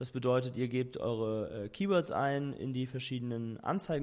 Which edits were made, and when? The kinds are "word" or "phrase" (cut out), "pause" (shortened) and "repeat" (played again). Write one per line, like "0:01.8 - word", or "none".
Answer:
none